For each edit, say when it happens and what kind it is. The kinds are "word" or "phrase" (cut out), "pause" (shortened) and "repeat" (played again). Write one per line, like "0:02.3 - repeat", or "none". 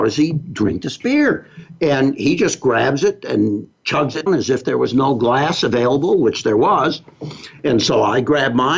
0:03.7 - word
0:04.3 - word